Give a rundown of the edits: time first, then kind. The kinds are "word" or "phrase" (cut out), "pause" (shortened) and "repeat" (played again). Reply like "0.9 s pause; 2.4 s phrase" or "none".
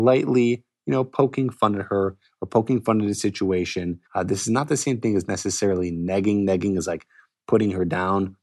4.1 s pause